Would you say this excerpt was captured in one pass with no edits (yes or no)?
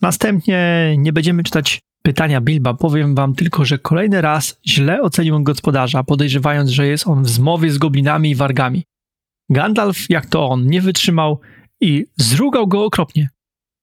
yes